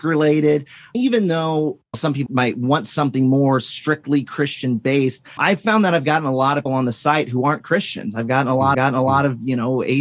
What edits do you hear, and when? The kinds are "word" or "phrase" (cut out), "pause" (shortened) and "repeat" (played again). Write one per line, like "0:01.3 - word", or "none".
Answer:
0:01.9 - pause
0:02.3 - word
0:05.4 - word
0:06.7 - word
0:08.7 - repeat